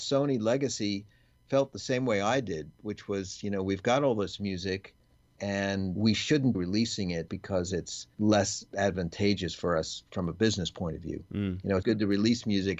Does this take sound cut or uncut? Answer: cut